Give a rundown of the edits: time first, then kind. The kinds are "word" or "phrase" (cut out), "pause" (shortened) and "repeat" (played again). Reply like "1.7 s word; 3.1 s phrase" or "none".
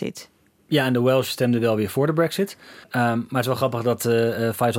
2.8 s pause